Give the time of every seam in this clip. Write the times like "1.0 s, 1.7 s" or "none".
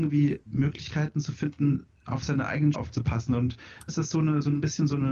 2.7 s, 3.9 s